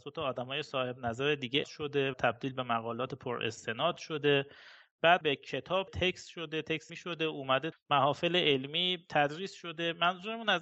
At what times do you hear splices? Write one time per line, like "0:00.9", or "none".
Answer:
0:01.6
0:02.1
0:05.2
0:05.9
0:06.9
0:07.7